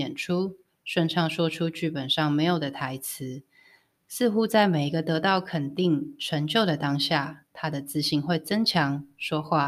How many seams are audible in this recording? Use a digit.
0